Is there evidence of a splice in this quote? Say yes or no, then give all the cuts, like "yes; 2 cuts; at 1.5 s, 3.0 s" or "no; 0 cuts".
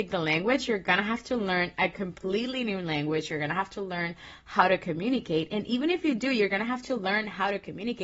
no; 0 cuts